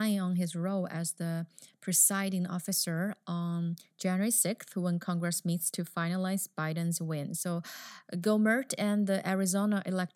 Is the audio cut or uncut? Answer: uncut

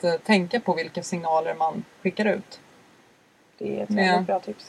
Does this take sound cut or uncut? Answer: uncut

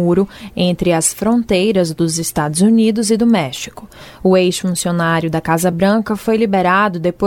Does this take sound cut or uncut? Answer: uncut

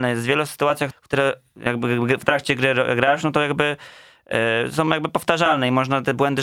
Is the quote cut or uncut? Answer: cut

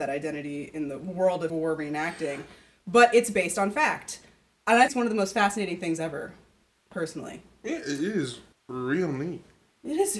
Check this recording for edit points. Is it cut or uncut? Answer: cut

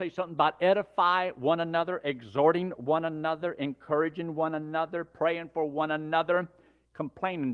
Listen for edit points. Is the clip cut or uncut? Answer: uncut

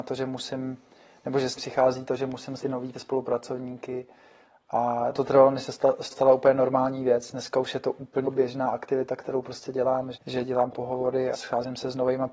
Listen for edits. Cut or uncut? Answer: cut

